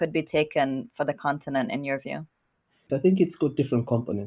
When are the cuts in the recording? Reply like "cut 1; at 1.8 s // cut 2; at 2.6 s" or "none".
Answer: none